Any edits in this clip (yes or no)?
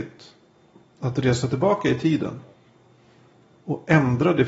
no